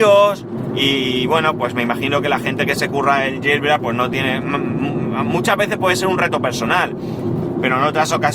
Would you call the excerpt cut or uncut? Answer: uncut